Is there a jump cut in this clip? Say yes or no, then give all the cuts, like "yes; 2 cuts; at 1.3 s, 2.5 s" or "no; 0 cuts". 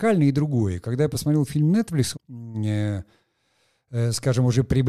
yes; 1 cut; at 2.1 s